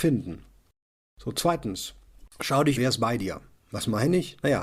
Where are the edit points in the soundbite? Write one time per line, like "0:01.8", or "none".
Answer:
0:02.8